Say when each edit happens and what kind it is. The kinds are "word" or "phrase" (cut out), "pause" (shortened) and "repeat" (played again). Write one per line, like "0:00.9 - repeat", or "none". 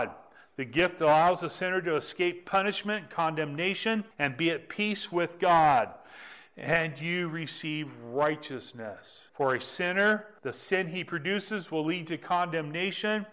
0:04.1 - pause
0:09.3 - pause
0:10.4 - pause